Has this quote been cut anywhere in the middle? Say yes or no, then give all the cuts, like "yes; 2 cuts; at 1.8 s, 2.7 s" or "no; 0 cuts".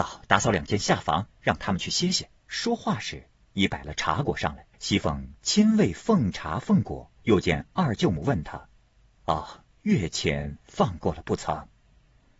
yes; 6 cuts; at 1.3 s, 2.4 s, 4.7 s, 7.2 s, 8.8 s, 9.7 s